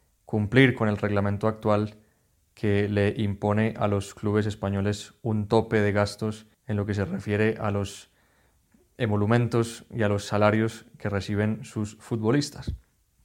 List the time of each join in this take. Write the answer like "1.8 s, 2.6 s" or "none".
6.5 s

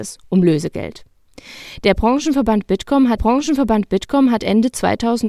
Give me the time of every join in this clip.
3.2 s

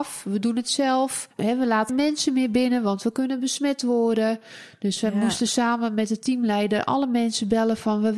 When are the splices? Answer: 1.9 s

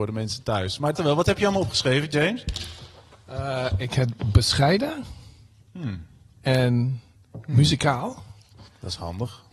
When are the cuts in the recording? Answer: 1.0 s

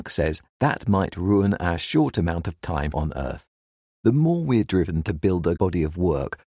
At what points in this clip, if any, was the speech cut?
2.6 s, 2.9 s, 5.6 s

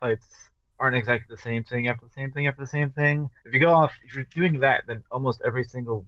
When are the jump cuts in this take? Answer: 3.4 s

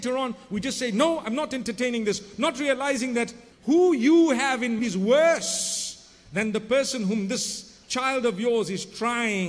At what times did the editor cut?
3.5 s, 4.8 s

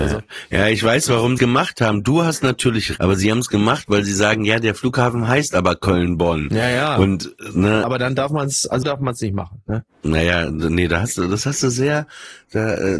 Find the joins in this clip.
1.4 s, 3.0 s, 7.8 s, 8.8 s

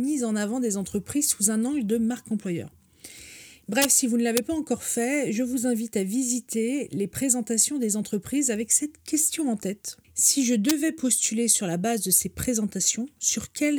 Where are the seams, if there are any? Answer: 10.0 s

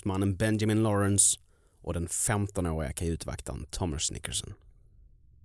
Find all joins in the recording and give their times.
none

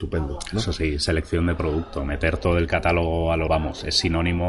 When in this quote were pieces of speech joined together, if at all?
3.5 s

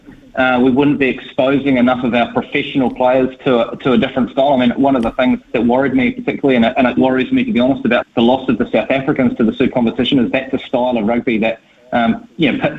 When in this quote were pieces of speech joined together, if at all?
5.4 s, 7.0 s, 8.0 s, 9.7 s

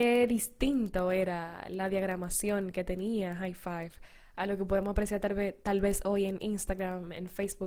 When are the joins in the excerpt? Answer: none

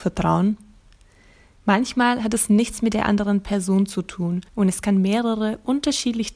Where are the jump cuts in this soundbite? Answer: 4.5 s

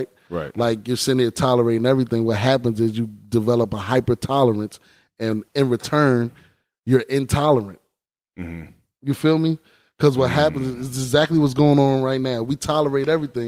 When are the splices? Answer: 5.5 s

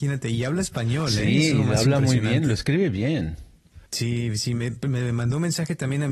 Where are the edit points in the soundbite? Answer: 3.9 s

